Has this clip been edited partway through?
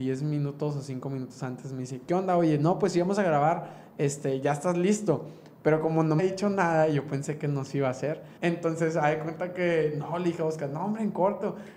yes; 2 cuts; at 6.2 s, 8.4 s

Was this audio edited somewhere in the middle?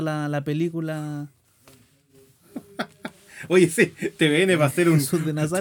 no; 0 cuts

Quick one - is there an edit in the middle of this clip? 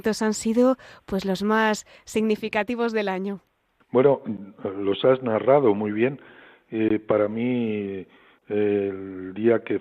no; 0 cuts

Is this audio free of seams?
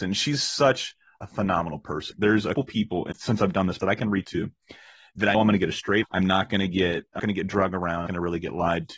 no; 9 cuts; at 2.1 s, 2.5 s, 3.1 s, 3.8 s, 4.2 s, 5.3 s, 6.0 s, 7.2 s, 8.1 s

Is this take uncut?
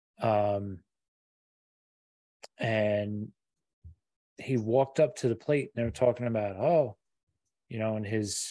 yes; 0 cuts

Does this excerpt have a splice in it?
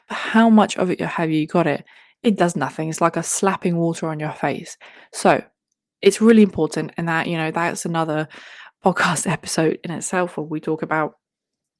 no; 0 cuts

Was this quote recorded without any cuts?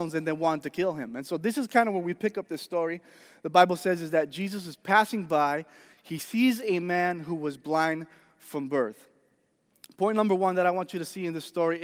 yes; 0 cuts

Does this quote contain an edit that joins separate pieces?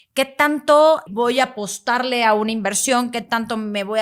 yes; 1 cut; at 1.1 s

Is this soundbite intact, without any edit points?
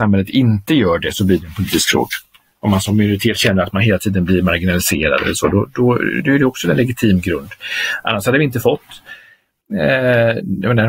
yes; 0 cuts

